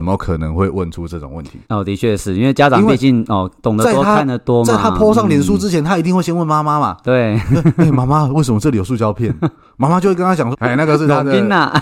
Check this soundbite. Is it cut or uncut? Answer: cut